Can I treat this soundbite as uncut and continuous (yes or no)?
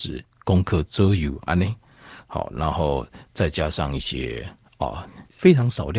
yes